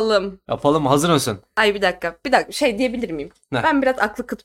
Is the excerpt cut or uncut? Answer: uncut